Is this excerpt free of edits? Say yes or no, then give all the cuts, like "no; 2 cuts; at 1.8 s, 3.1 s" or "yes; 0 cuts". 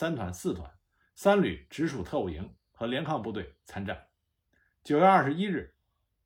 yes; 0 cuts